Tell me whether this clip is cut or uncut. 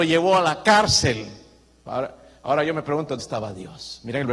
cut